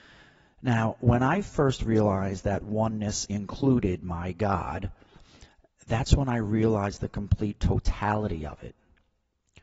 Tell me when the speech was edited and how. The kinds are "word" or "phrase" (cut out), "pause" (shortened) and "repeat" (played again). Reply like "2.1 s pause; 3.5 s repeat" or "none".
3.3 s word

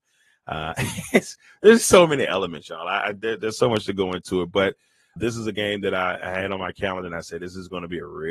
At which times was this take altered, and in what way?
5.2 s word

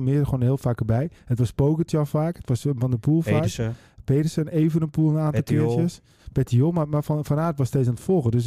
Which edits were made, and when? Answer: 1.2 s pause

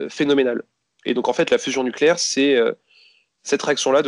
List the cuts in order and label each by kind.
none

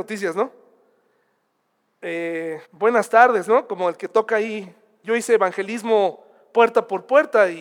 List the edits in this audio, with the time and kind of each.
2.6 s pause

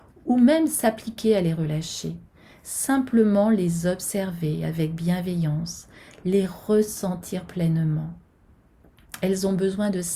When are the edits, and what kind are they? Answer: none

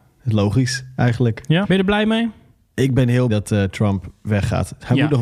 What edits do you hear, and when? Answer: 1.6 s word; 3.3 s word

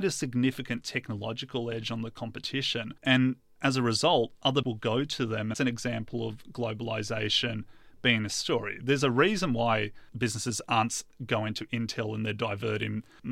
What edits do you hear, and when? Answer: 3.0 s pause; 4.6 s word; 5.5 s word; 8.3 s word

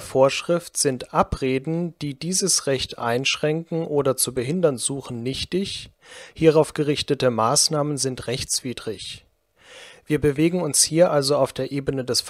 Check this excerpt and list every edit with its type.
none

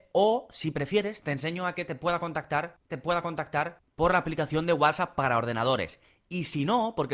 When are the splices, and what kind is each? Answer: 2.9 s repeat

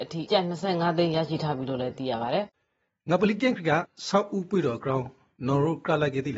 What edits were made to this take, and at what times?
none

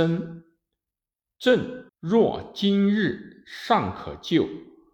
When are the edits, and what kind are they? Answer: 1.9 s pause

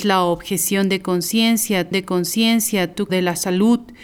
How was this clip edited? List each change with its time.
1.9 s repeat; 3.1 s phrase

